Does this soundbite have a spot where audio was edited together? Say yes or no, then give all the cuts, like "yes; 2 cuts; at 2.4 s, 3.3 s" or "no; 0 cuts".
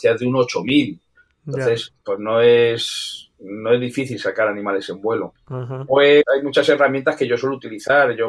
no; 0 cuts